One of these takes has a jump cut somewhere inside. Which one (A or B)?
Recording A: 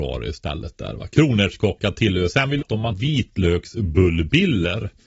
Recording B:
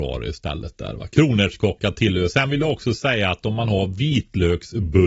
A